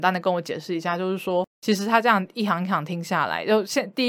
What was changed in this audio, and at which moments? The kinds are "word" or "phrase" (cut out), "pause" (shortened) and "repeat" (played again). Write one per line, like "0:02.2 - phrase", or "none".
0:01.5 - pause